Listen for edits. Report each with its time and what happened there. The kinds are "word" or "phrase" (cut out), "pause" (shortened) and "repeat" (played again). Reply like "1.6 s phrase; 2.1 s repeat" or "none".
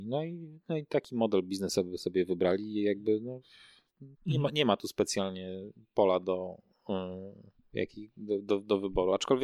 4.2 s pause